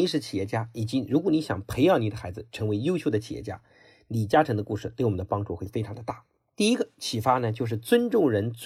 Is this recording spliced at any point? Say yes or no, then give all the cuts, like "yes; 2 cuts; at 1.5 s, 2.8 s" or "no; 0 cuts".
no; 0 cuts